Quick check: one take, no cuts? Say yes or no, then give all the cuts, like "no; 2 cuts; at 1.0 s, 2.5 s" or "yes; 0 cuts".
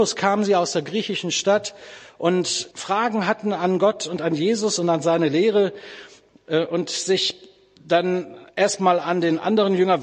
no; 2 cuts; at 2.7 s, 8.5 s